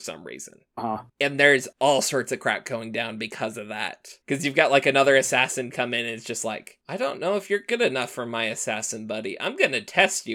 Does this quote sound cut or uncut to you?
cut